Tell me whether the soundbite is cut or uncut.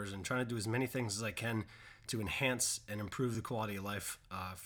uncut